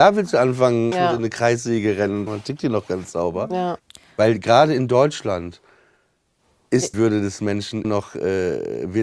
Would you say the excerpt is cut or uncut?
cut